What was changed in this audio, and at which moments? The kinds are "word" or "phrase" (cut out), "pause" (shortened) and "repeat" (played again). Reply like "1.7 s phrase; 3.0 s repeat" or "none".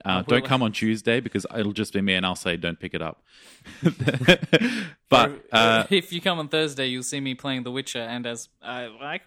none